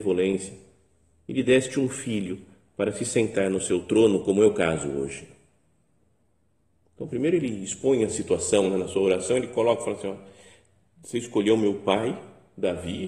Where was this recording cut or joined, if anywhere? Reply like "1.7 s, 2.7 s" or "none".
none